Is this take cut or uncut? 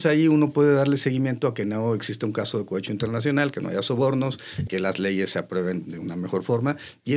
cut